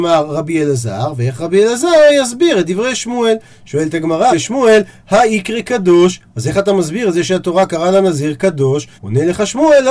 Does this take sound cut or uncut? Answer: cut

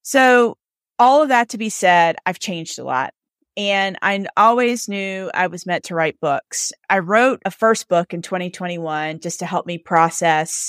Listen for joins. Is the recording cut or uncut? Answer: uncut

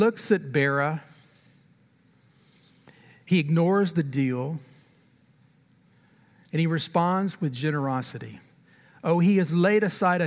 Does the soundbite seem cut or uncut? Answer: uncut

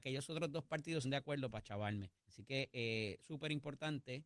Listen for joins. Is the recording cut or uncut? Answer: cut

